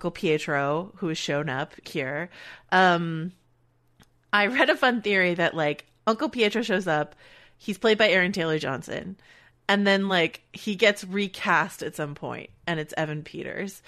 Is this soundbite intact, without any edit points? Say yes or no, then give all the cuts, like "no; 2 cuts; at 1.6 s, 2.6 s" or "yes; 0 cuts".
yes; 0 cuts